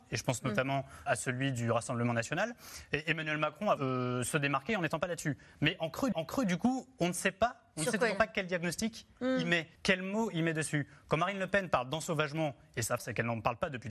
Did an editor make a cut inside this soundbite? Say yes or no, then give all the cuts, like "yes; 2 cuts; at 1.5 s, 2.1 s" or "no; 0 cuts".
yes; 5 cuts; at 1.1 s, 3.8 s, 6.1 s, 9.8 s, 13.0 s